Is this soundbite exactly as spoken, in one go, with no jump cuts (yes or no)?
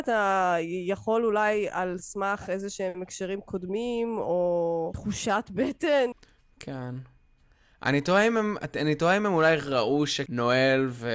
yes